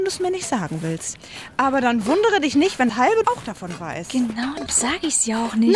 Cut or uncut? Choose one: cut